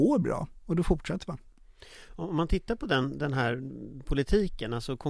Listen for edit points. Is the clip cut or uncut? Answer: uncut